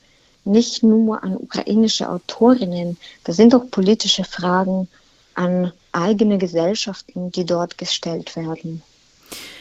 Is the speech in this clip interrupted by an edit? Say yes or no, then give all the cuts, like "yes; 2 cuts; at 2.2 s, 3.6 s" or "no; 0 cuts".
no; 0 cuts